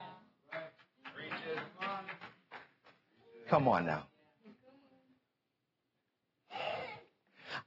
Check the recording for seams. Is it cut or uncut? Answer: uncut